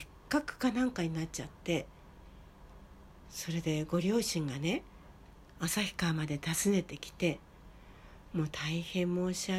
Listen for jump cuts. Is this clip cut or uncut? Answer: uncut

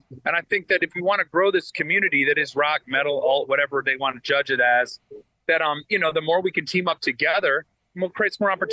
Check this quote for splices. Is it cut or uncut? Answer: uncut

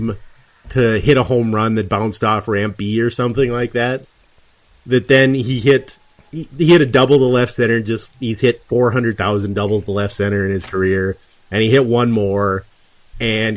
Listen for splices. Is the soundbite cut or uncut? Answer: uncut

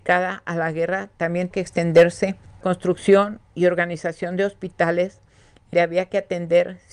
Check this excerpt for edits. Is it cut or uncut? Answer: cut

